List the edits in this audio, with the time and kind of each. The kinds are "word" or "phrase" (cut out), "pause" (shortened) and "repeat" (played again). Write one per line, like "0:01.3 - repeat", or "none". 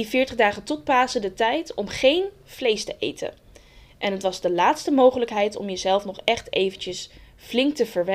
none